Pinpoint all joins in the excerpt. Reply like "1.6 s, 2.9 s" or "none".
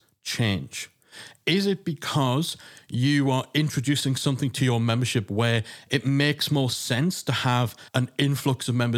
7.9 s